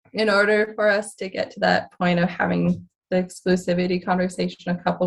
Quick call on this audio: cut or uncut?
uncut